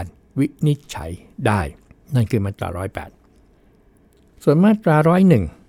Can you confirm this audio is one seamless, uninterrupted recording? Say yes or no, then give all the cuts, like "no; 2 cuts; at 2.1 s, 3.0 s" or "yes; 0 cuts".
no; 1 cut; at 1.9 s